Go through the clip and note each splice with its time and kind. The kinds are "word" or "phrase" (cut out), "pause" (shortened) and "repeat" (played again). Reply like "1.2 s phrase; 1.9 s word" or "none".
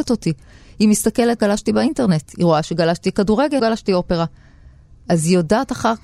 1.4 s word; 3.6 s word